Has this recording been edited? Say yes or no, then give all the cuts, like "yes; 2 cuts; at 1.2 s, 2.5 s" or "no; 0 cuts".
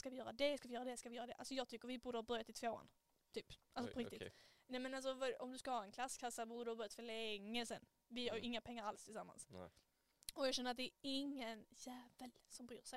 no; 0 cuts